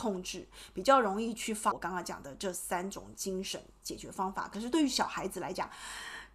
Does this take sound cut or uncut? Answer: cut